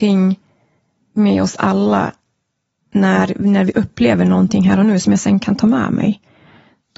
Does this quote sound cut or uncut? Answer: uncut